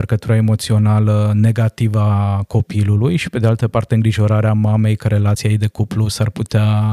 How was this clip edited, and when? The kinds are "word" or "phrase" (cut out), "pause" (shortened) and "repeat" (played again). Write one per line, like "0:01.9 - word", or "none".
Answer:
none